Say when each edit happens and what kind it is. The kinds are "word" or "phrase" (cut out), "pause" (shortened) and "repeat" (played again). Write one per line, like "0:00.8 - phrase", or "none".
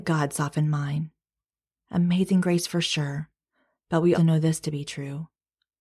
0:04.1 - word